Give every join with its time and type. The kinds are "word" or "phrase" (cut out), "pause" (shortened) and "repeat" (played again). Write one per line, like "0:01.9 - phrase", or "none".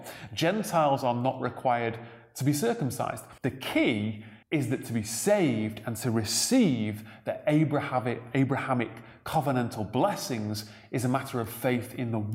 0:03.4 - pause
0:04.4 - pause